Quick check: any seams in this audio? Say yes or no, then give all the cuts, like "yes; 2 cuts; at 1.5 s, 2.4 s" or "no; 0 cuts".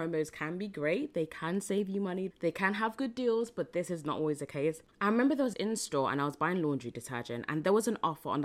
yes; 2 cuts; at 4.9 s, 5.5 s